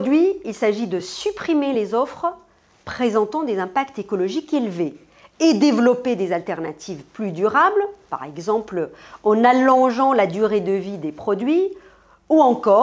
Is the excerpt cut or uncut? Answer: uncut